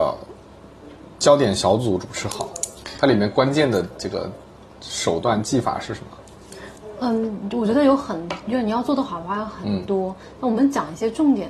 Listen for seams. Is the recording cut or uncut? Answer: uncut